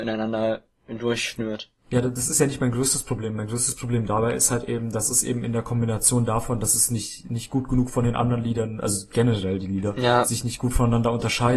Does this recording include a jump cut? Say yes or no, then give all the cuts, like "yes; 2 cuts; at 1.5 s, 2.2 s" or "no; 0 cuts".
yes; 1 cut; at 1.8 s